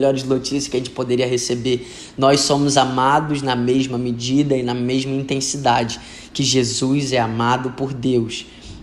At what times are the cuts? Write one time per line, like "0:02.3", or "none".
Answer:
none

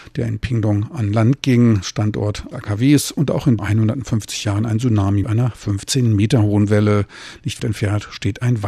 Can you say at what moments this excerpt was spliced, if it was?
0:02.5
0:03.6
0:05.2
0:07.6

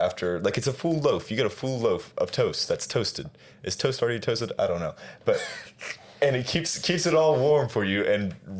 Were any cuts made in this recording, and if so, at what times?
none

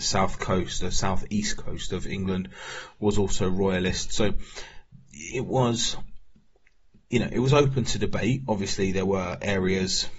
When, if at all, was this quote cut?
none

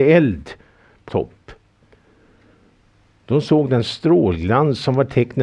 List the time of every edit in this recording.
0:01.1

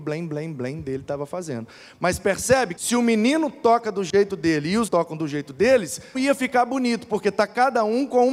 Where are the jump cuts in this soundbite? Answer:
0:02.8
0:04.9
0:06.1

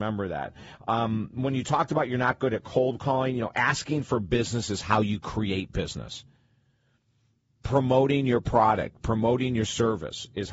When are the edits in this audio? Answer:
none

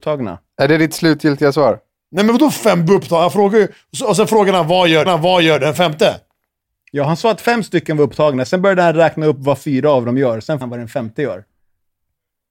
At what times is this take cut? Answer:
0:05.1
0:10.6

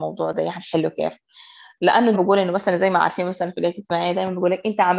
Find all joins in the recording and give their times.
0:02.1

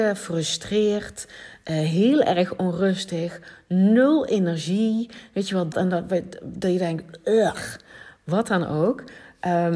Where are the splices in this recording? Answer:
0:05.7

